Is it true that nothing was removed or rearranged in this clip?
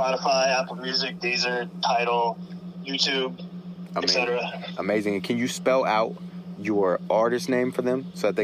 no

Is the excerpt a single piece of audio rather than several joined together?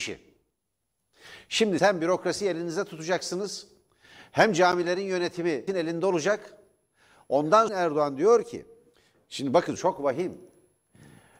no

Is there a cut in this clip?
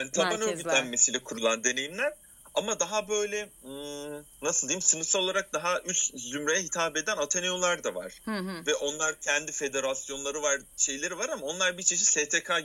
no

